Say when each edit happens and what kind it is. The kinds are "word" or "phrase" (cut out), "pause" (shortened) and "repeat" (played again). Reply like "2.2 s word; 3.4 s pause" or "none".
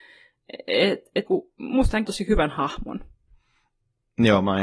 1.3 s word; 2.1 s word